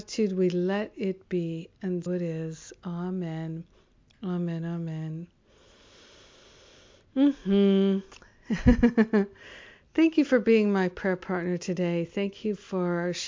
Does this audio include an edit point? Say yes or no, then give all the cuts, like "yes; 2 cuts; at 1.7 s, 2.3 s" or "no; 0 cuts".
yes; 1 cut; at 2.1 s